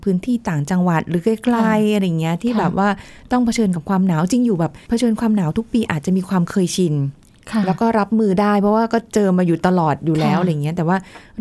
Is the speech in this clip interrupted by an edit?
yes; 1 cut; at 4.8 s

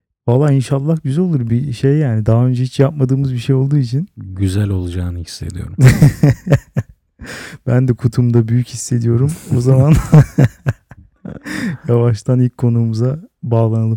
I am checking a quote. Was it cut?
no; 0 cuts

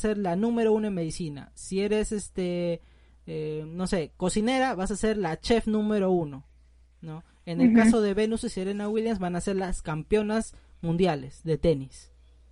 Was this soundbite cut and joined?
no; 0 cuts

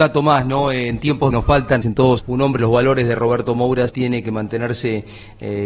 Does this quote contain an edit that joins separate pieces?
yes; 5 cuts; at 1.3 s, 1.8 s, 2.2 s, 2.6 s, 3.9 s

